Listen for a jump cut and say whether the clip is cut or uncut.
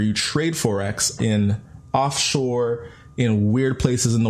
cut